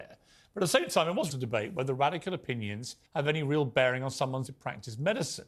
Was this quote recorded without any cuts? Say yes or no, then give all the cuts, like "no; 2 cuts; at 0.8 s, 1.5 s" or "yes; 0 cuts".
no; 3 cuts; at 1.3 s, 3.0 s, 4.5 s